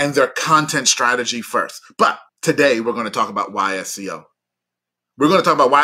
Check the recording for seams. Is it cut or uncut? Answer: cut